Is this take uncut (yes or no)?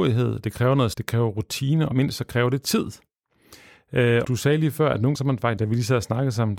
no